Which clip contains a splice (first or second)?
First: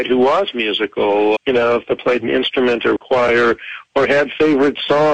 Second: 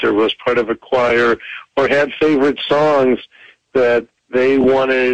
first